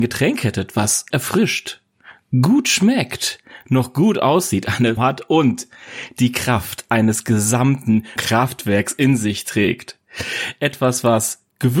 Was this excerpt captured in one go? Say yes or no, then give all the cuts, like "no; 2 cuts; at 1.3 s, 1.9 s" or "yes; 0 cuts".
no; 3 cuts; at 1.1 s, 5.0 s, 8.2 s